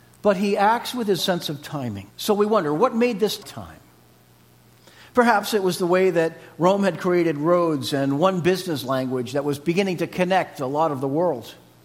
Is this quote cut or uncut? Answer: cut